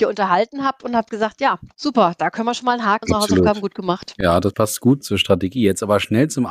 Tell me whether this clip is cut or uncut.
cut